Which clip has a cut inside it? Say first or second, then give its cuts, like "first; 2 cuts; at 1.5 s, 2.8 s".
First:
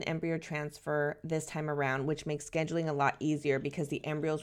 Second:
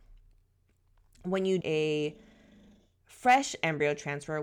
second; 1 cut; at 1.6 s